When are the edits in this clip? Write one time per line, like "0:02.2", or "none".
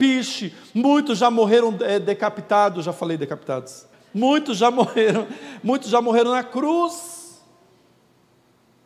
0:03.9